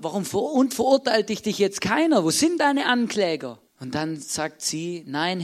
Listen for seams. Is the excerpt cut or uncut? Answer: cut